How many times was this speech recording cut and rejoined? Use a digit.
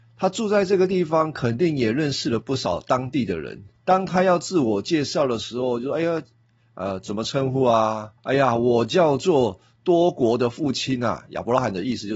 2